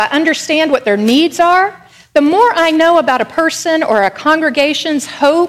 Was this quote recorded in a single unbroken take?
yes; 0 cuts

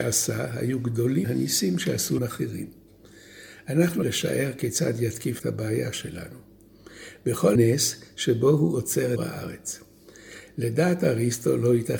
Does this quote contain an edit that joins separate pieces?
yes; 6 cuts; at 1.2 s, 2.2 s, 4.0 s, 5.4 s, 7.5 s, 9.2 s

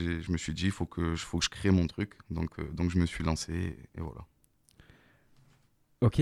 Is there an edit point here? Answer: no; 0 cuts

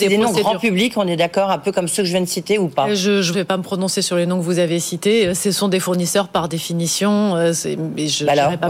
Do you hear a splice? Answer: yes; 1 cut; at 3.3 s

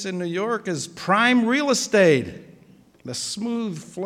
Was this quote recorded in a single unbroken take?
no; 1 cut; at 2.9 s

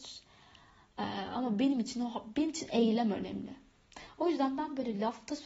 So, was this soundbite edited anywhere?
no; 0 cuts

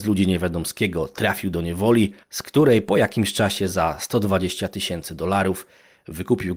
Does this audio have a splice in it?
yes; 1 cut; at 2.2 s

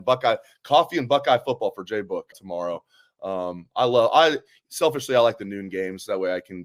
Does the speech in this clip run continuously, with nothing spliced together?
no; 1 cut; at 2.3 s

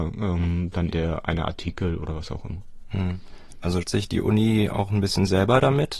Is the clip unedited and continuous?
no; 2 cuts; at 0.9 s, 3.8 s

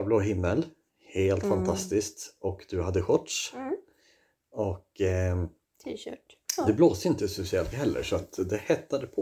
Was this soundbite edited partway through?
yes; 1 cut; at 7.7 s

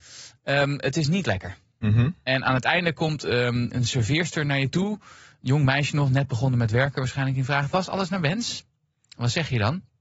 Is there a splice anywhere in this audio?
yes; 1 cut; at 3.7 s

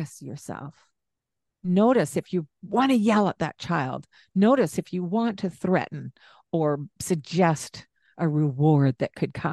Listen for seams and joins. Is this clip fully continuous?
yes; 0 cuts

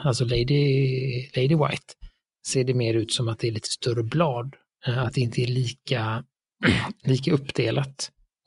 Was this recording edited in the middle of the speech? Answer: no; 0 cuts

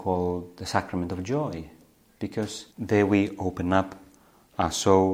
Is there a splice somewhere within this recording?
yes; 1 cut; at 2.7 s

